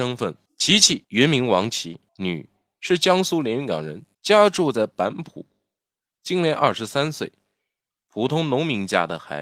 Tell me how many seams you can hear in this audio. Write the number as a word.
two